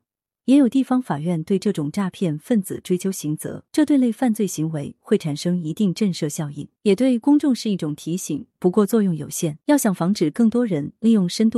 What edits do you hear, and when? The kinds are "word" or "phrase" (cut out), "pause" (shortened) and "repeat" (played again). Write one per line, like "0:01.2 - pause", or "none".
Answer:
0:03.7 - pause
0:06.8 - pause
0:09.6 - pause

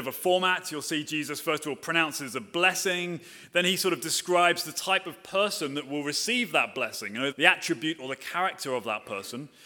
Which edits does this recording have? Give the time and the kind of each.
0:07.3 - word

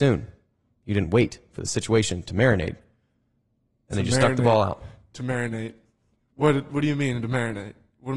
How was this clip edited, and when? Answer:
none

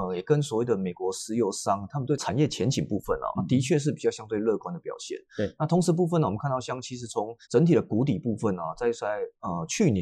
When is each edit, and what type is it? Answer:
0:03.4 - word
0:07.4 - pause

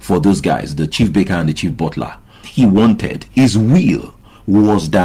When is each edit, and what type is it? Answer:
0:02.4 - word

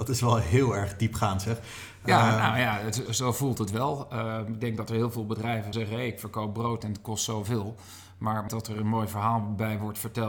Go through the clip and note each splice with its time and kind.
0:03.1 - word
0:05.7 - word
0:08.5 - word

